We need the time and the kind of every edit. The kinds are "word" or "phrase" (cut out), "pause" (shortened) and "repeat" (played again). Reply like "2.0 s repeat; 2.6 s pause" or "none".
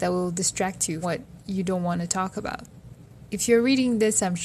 1.0 s word